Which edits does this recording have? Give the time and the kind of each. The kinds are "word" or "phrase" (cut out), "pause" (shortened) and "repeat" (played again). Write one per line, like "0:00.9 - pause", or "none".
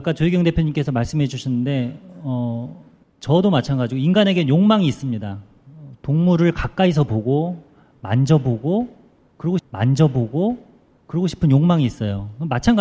0:03.0 - pause
0:09.6 - repeat